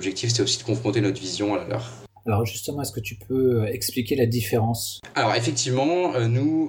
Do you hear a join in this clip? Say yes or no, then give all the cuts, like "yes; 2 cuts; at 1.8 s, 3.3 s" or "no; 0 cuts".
no; 0 cuts